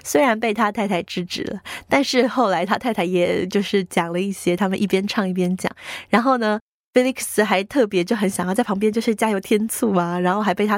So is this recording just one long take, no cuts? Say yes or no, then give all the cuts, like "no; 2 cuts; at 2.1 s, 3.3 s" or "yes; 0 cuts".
yes; 0 cuts